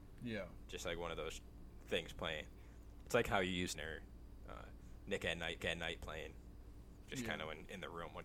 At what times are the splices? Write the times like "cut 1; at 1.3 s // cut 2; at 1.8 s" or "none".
cut 1; at 3.7 s // cut 2; at 5.6 s